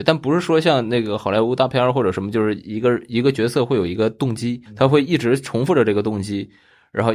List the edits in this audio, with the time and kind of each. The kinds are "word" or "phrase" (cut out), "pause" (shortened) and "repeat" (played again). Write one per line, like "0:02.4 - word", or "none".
0:04.7 - pause

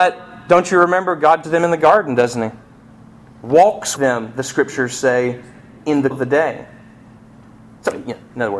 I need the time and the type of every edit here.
0:01.4 - word
0:04.0 - word
0:06.1 - word

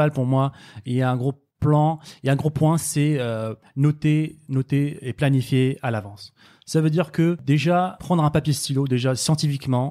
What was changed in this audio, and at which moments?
none

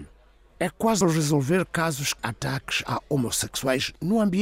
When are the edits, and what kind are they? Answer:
0:01.0 - word
0:02.2 - word

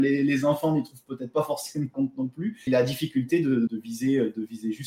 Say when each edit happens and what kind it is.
0:01.9 - word
0:02.7 - word
0:03.7 - word

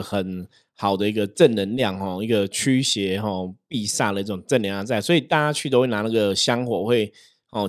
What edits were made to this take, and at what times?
none

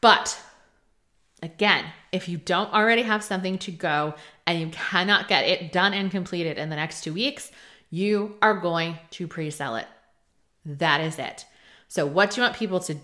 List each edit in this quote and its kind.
none

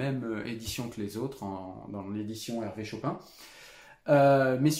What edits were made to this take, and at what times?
none

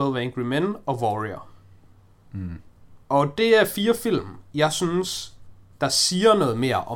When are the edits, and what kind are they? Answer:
0:03.0 - pause
0:05.7 - pause

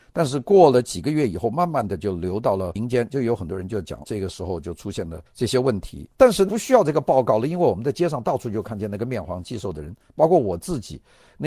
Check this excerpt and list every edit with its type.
0:04.0 - word
0:05.3 - pause

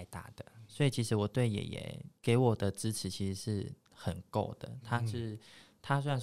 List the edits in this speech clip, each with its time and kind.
0:02.2 - pause

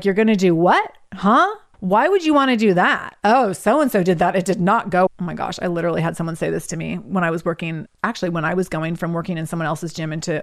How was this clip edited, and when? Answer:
0:05.1 - word

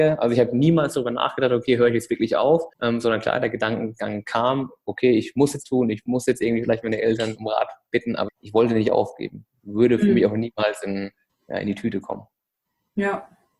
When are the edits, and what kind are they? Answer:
0:02.7 - pause
0:05.6 - word
0:08.3 - word
0:11.3 - pause

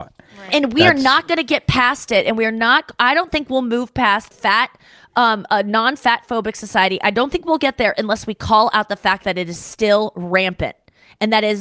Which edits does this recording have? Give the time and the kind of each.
0:04.3 - phrase

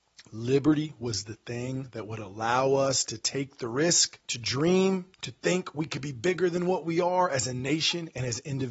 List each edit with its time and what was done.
0:04.2 - pause
0:05.1 - pause

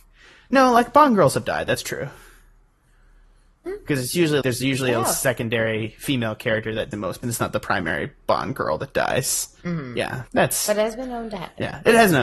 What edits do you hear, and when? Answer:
0:03.7 - word
0:04.4 - word
0:06.9 - word
0:07.2 - phrase
0:09.6 - pause
0:10.3 - pause

